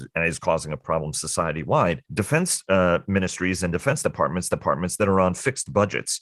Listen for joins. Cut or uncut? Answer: cut